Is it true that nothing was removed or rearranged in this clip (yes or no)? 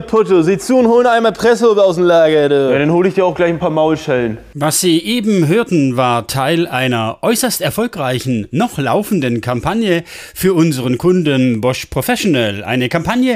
yes